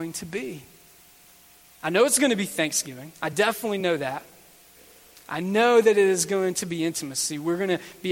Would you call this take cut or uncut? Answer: uncut